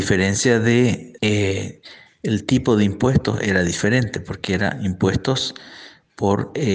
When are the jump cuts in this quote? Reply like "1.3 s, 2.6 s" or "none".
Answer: 1.2 s